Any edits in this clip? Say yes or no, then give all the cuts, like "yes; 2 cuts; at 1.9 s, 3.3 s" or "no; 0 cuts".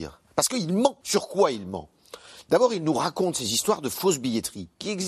yes; 1 cut; at 1.0 s